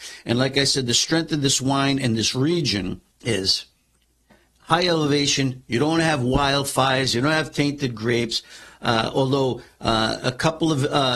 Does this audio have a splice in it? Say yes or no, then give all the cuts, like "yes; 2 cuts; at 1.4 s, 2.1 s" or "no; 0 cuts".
yes; 1 cut; at 3.1 s